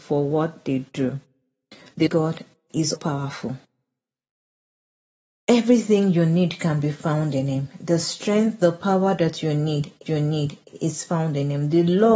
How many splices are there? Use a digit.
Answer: 3